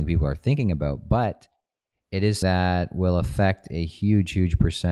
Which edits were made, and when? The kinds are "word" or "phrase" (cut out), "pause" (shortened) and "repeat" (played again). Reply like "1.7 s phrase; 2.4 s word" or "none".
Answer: 2.4 s word